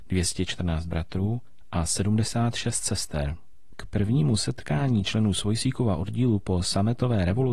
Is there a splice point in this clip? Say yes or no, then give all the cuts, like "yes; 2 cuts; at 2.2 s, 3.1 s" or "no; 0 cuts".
no; 0 cuts